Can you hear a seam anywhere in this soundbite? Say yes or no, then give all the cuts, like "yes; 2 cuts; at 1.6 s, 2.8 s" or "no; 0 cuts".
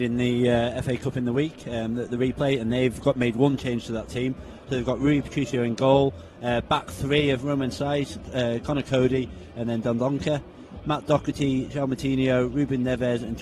no; 0 cuts